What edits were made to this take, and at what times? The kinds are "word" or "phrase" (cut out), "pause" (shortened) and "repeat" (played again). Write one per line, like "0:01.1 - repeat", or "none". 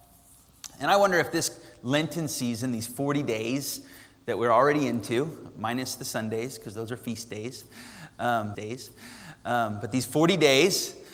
0:08.5 - repeat

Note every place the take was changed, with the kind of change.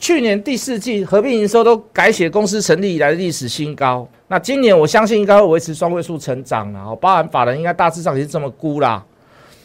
0:04.1 - pause

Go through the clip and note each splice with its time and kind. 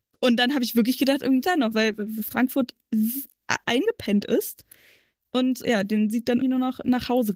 0:01.4 - word
0:01.7 - word
0:03.6 - word
0:05.6 - word
0:06.4 - word

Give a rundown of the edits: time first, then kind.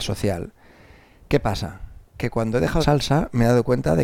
0:02.1 - pause
0:02.8 - phrase

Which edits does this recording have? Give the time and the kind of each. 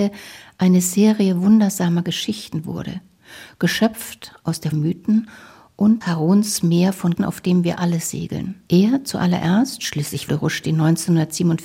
0:04.7 - phrase
0:06.0 - word
0:07.2 - word
0:08.7 - pause
0:10.3 - word

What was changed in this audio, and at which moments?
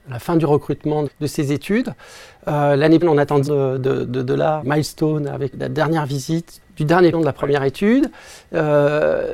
0:01.1 - word
0:03.0 - word
0:03.5 - word
0:04.6 - word
0:05.5 - word
0:06.6 - word
0:07.1 - word

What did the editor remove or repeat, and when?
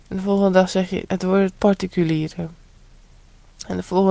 0:01.1 - word
0:01.5 - word

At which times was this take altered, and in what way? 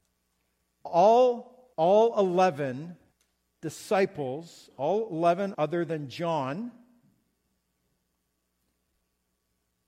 0:01.7 - pause
0:03.1 - pause
0:05.5 - word

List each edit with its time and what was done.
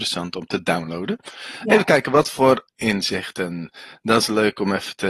none

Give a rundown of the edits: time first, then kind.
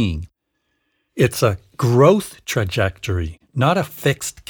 0:03.4 - pause

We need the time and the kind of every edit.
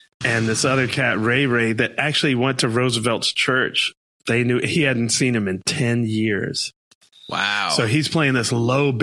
none

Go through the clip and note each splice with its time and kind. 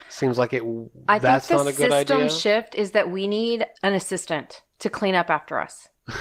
0:03.8 - pause
0:04.7 - pause

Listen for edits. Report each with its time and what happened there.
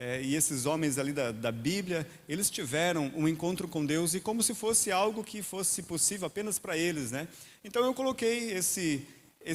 none

